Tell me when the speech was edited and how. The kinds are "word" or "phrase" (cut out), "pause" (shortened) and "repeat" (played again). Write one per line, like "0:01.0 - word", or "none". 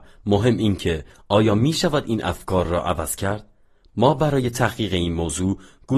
none